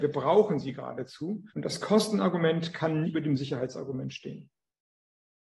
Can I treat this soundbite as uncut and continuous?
no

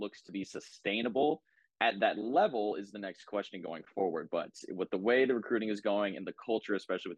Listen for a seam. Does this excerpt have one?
no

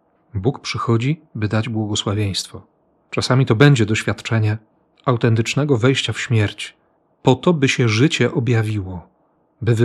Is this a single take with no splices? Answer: yes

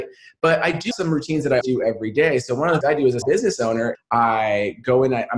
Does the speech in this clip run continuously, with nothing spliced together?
no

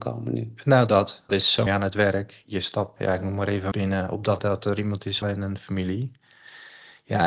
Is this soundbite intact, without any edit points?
no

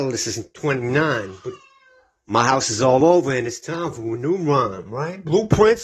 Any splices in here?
no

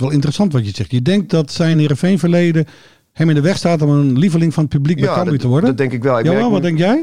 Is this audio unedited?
yes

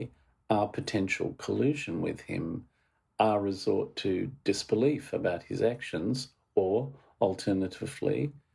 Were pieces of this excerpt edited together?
no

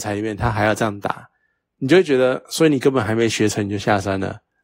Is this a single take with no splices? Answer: yes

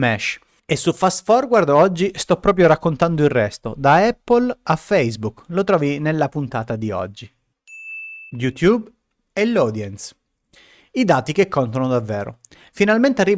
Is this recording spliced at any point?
no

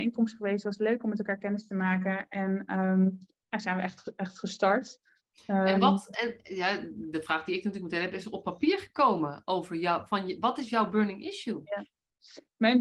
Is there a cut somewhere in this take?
yes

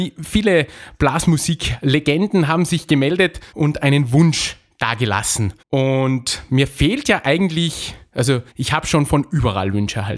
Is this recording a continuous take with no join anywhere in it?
no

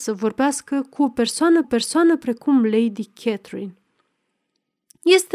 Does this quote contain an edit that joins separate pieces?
yes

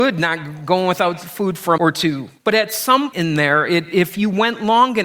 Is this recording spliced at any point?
yes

